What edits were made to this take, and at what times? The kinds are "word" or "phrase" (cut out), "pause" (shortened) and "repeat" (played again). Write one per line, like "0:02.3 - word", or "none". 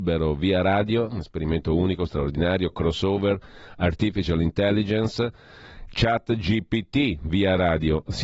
none